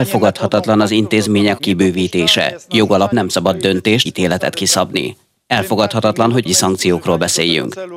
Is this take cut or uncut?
cut